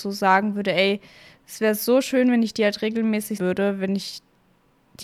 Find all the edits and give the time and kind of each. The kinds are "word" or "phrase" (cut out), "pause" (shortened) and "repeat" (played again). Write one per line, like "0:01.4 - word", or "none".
0:03.4 - word